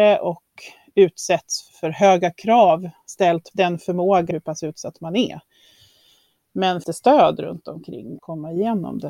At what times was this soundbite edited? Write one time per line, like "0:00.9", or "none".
0:01.7
0:03.5
0:04.3
0:06.8
0:08.2